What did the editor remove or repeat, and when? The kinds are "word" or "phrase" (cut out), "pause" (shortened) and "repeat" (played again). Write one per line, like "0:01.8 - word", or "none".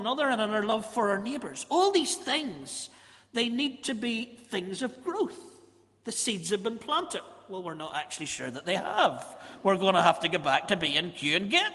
none